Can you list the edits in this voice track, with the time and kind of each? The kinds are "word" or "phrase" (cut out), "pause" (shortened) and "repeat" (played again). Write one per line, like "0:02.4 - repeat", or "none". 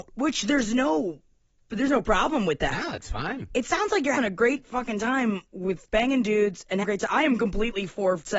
0:04.2 - word
0:05.8 - word
0:06.8 - word